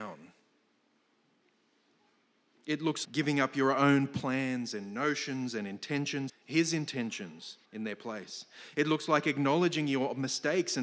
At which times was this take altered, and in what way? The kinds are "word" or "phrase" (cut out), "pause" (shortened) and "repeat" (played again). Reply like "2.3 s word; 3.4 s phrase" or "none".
3.0 s word; 6.3 s phrase; 7.7 s pause